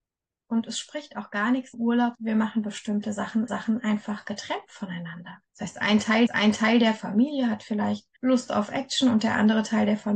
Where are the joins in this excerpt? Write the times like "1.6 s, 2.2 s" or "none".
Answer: 1.7 s, 2.1 s, 3.5 s, 5.5 s, 6.3 s, 8.2 s